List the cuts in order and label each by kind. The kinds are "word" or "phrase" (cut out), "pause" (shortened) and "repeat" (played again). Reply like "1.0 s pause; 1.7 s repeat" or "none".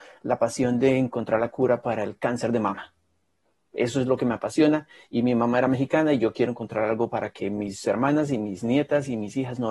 none

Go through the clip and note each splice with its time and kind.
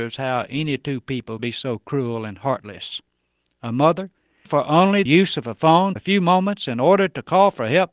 1.4 s word; 4.5 s word; 5.1 s word; 6.0 s word

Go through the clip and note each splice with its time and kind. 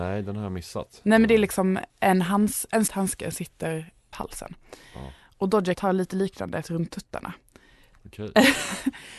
1.9 s pause; 2.9 s word; 3.3 s word; 4.1 s phrase; 5.7 s word; 6.6 s word

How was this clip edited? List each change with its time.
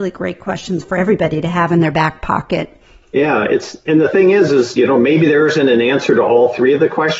3.0 s pause

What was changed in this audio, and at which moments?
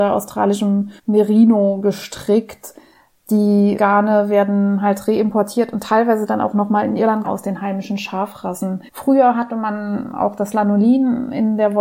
1.0 s pause; 3.8 s word; 7.2 s phrase; 8.9 s pause

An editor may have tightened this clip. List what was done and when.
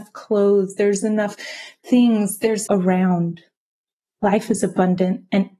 2.7 s phrase

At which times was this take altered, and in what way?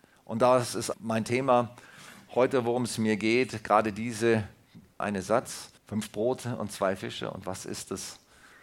0.9 s word; 5.0 s phrase; 5.8 s pause

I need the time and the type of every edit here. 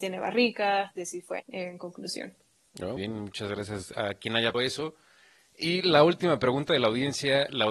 1.4 s phrase; 3.0 s word; 4.5 s word

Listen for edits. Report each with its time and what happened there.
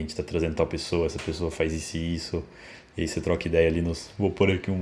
none

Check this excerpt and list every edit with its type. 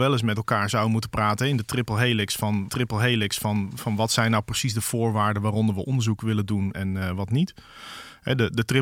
2.7 s repeat; 6.7 s word

